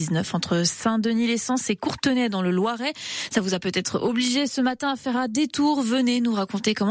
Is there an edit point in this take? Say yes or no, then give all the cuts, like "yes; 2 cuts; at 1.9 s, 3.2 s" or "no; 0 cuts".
no; 0 cuts